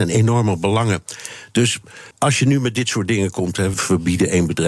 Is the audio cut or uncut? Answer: cut